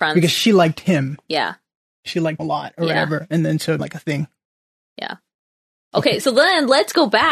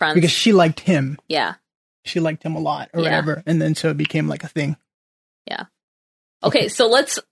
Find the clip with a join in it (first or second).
first